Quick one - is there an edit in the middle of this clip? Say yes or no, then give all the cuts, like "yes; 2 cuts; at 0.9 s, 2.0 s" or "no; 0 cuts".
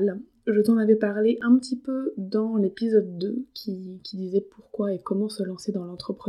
no; 0 cuts